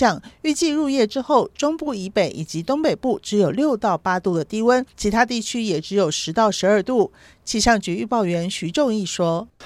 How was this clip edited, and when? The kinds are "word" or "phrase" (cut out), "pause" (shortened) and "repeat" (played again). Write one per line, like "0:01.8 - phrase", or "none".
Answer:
0:04.9 - pause